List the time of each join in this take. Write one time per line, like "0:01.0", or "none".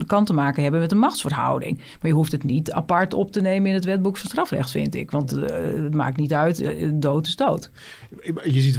none